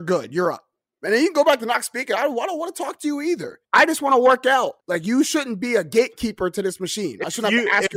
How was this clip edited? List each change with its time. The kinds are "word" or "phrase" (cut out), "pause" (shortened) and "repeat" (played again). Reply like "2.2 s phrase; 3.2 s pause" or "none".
3.6 s pause; 4.8 s pause